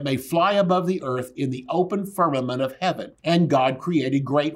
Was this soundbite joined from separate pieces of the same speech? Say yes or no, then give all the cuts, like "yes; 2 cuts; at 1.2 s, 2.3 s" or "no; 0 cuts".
yes; 1 cut; at 3.2 s